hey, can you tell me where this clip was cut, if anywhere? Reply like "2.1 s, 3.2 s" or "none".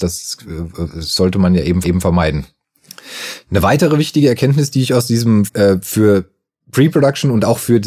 1.8 s, 5.5 s